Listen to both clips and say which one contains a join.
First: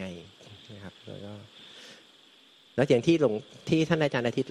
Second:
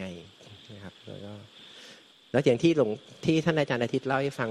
second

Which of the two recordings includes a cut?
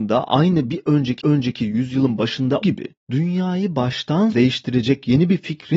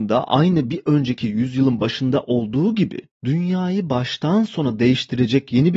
first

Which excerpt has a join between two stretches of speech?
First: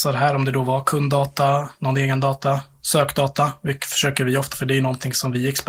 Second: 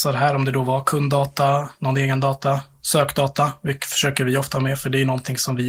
first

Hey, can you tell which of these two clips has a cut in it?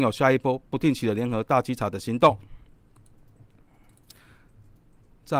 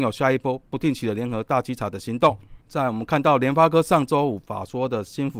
second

